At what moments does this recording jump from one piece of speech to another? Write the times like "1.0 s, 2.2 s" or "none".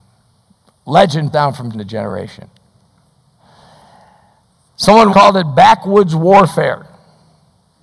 1.3 s, 1.7 s, 5.1 s